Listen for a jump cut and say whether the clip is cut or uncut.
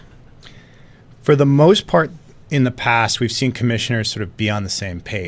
uncut